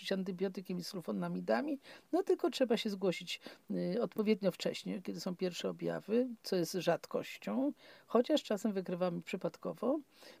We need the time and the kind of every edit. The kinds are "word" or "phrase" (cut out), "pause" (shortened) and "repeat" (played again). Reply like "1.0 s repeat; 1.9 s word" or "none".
none